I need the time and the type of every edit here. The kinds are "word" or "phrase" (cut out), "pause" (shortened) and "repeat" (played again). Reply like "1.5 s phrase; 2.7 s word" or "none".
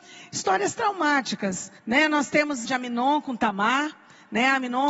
1.8 s pause; 2.7 s phrase